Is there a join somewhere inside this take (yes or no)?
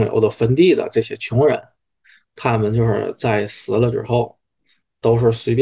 no